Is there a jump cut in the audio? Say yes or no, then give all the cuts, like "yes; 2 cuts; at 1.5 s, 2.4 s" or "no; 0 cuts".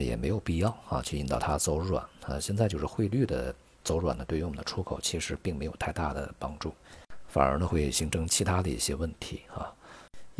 no; 0 cuts